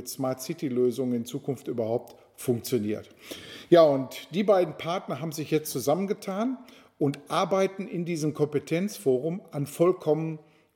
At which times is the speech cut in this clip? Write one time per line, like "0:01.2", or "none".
none